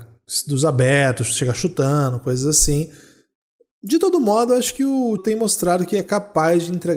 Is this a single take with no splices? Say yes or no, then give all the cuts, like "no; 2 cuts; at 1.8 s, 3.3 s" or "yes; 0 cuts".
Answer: no; 1 cut; at 5.2 s